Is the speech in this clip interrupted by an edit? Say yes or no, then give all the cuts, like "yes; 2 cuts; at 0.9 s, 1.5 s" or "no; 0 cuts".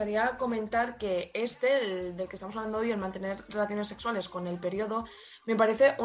no; 0 cuts